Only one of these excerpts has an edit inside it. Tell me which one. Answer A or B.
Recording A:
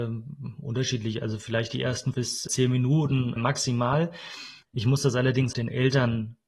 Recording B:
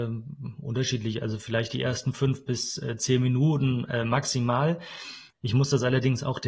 A